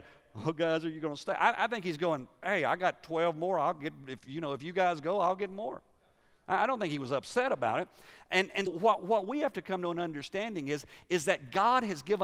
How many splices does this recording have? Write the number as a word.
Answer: one